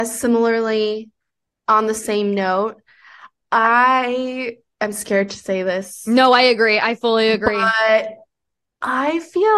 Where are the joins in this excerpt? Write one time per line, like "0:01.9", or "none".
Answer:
none